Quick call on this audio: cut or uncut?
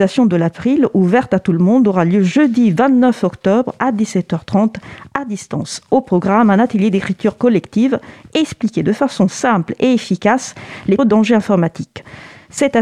cut